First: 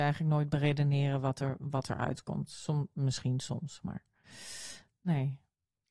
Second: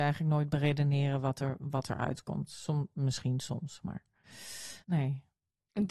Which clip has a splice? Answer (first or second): second